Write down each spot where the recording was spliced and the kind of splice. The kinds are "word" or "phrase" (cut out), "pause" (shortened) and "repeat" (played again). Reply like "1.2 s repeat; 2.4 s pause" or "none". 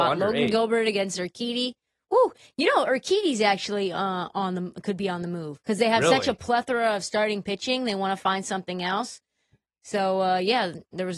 5.6 s pause